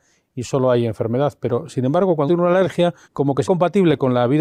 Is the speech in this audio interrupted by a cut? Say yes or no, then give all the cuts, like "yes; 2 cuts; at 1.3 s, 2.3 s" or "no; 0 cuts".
yes; 3 cuts; at 2.3 s, 3.0 s, 3.4 s